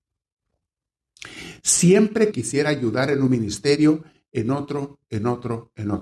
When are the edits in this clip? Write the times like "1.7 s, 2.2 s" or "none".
2.3 s